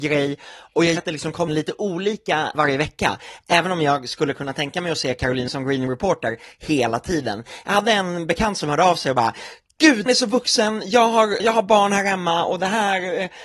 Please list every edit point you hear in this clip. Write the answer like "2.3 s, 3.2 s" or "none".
1.0 s, 1.5 s, 2.5 s, 5.5 s, 5.9 s, 10.1 s, 11.4 s